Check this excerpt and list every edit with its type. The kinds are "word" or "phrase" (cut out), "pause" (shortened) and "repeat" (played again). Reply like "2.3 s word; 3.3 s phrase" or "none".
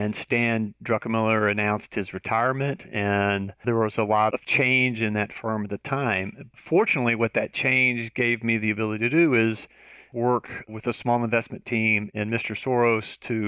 3.6 s word; 4.3 s word